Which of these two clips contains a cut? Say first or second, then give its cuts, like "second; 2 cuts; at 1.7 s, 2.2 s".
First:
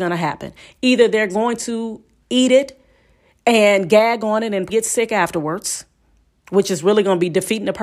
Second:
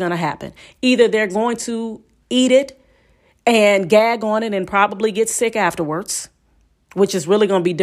first; 1 cut; at 4.7 s